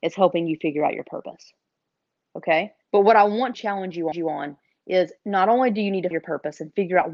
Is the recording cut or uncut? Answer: cut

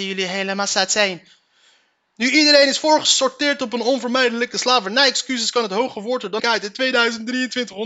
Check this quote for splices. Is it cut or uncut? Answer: cut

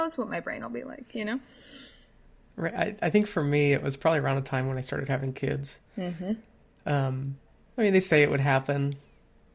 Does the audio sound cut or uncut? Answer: uncut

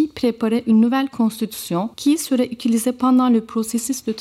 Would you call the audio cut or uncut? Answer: cut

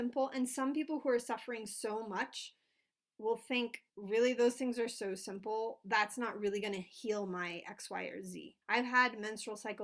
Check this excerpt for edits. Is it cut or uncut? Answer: cut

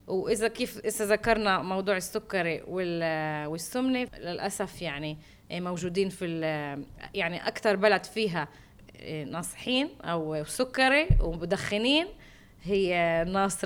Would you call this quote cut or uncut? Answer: cut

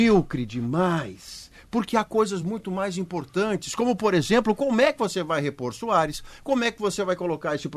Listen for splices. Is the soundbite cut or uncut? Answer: uncut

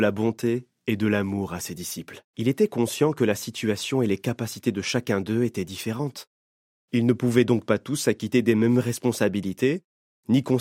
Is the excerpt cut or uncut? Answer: cut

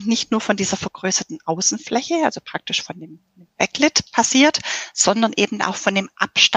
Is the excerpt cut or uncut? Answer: uncut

